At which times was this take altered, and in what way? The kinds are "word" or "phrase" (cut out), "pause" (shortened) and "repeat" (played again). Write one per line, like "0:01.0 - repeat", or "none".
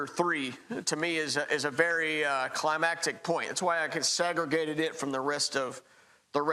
none

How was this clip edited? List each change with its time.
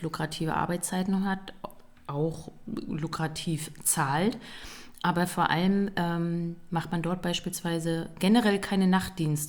none

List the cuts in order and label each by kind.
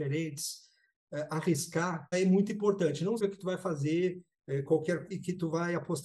0:02.1 - word
0:03.2 - word
0:05.1 - word

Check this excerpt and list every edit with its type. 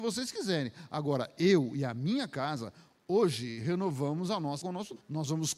0:04.6 - word

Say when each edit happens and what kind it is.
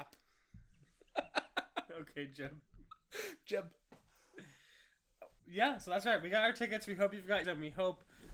0:05.4 - word
0:07.4 - word

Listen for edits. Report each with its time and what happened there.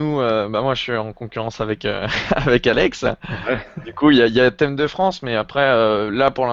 none

